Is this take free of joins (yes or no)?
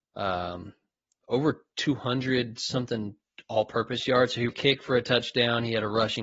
no